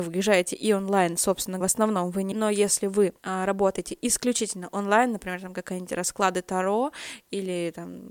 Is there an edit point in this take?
yes; 3 cuts; at 1.6 s, 2.3 s, 3.2 s

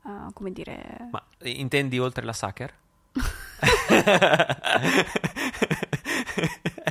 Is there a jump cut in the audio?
no; 0 cuts

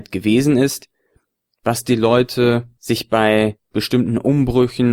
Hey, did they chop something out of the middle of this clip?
no; 0 cuts

